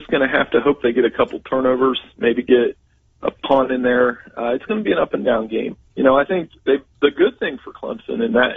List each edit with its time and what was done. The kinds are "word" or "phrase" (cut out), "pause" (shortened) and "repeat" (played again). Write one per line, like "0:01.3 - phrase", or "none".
none

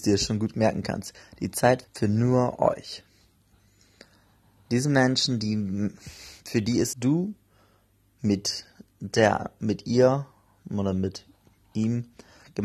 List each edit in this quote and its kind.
0:01.8 - word
0:06.9 - phrase

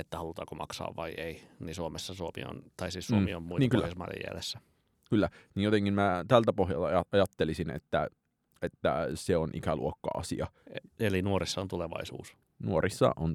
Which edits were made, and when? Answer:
none

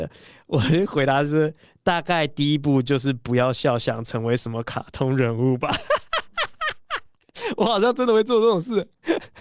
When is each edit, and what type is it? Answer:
none

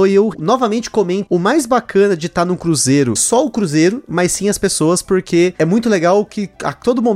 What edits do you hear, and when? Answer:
0:01.3 - word
0:03.2 - phrase

